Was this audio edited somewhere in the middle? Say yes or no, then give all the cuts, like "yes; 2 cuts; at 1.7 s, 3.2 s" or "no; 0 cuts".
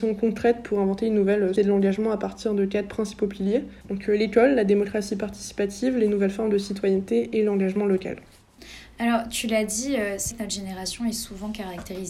yes; 3 cuts; at 1.6 s, 3.8 s, 10.3 s